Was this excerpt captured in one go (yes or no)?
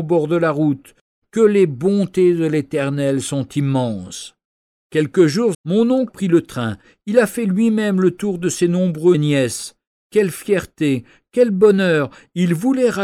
no